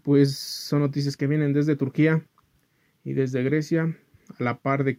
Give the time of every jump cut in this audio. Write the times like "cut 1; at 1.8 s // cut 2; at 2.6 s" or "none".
none